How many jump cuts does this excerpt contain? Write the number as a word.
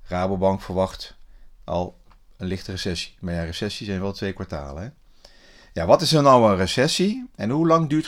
zero